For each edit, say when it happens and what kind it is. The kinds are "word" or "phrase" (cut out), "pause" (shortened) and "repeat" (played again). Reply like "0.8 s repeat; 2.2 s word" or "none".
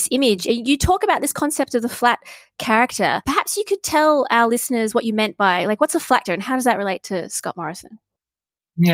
6.3 s word